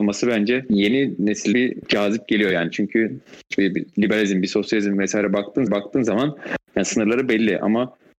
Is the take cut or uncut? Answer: cut